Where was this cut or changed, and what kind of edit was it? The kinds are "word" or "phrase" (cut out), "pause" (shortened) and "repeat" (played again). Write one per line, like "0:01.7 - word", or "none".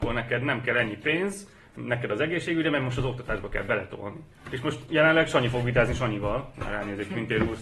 none